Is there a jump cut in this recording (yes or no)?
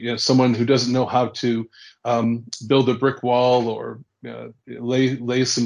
no